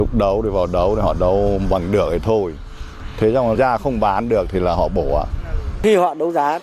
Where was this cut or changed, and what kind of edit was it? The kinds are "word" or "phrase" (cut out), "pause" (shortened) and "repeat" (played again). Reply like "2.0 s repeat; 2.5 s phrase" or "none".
3.6 s word